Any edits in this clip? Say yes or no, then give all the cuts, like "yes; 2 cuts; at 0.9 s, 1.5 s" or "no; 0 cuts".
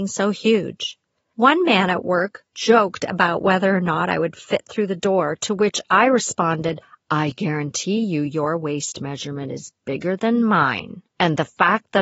no; 0 cuts